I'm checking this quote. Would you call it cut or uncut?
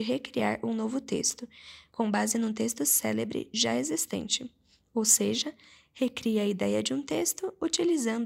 uncut